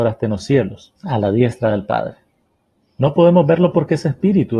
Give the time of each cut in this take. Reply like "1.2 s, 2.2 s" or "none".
1.0 s, 2.4 s

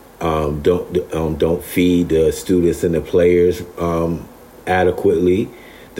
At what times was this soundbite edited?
none

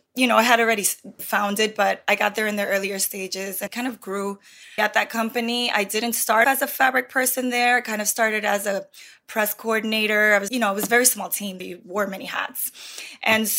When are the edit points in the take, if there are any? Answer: 1.2 s, 3.7 s, 4.8 s, 6.4 s, 10.5 s, 11.6 s

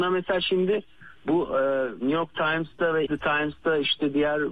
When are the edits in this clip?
1.2 s, 3.1 s

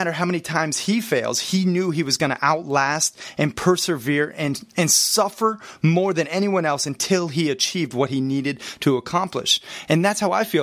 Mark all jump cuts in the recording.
none

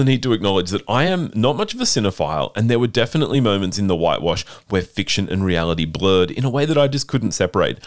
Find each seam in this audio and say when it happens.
none

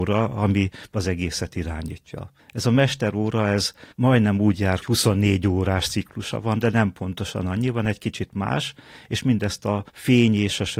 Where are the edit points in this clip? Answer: 3.9 s, 4.8 s, 9.9 s

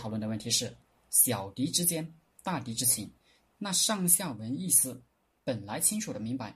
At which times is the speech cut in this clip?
none

